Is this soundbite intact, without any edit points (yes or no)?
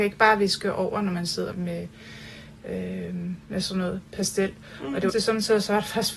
no